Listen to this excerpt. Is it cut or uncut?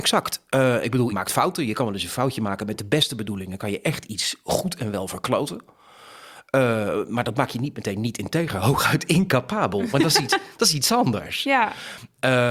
cut